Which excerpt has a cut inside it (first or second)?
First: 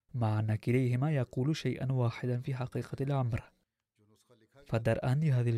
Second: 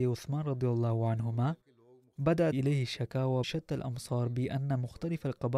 second